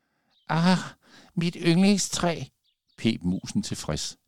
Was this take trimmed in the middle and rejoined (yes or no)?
no